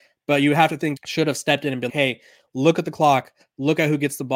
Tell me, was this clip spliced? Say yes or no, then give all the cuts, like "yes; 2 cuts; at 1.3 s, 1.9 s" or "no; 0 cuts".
yes; 2 cuts; at 1.0 s, 1.9 s